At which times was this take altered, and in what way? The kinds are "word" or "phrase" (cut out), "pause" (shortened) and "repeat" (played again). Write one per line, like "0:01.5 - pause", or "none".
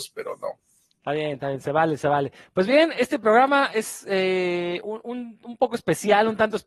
none